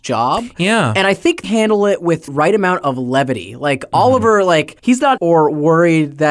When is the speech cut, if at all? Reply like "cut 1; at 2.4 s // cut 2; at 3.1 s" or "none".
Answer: cut 1; at 1.4 s // cut 2; at 2.3 s // cut 3; at 4.8 s // cut 4; at 5.2 s